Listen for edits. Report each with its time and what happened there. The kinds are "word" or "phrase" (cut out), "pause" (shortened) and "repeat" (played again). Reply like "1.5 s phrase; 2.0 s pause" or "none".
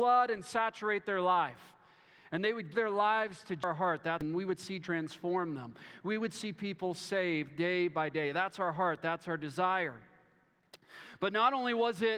2.7 s word; 4.8 s word